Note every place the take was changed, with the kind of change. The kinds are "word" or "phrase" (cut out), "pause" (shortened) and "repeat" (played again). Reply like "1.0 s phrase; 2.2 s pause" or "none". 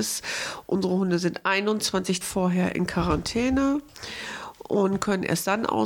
2.2 s word